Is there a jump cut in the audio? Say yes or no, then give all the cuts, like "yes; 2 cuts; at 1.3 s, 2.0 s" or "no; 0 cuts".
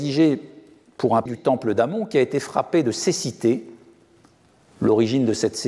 yes; 1 cut; at 1.3 s